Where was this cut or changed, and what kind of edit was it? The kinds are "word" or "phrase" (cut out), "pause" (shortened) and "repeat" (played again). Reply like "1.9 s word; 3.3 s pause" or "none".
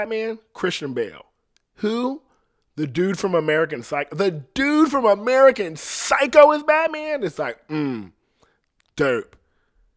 none